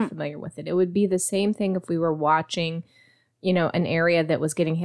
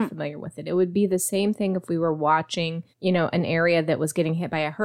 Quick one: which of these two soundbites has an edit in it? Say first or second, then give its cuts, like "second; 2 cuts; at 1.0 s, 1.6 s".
second; 1 cut; at 2.9 s